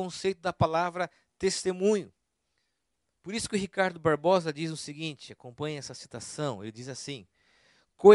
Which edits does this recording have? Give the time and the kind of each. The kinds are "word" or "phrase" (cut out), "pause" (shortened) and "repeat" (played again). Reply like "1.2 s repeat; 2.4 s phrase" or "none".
none